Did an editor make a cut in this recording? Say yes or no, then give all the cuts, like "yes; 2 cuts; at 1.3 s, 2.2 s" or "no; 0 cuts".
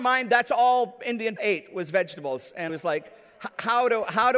yes; 2 cuts; at 1.4 s, 2.7 s